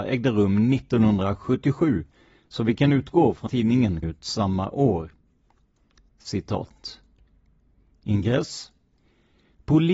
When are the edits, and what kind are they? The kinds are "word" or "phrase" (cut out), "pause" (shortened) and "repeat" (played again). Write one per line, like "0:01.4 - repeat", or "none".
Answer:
0:03.5 - word
0:04.0 - word